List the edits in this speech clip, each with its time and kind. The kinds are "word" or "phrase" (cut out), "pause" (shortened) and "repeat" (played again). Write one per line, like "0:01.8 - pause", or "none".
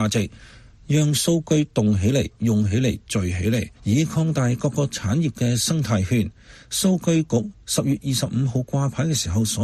0:03.8 - pause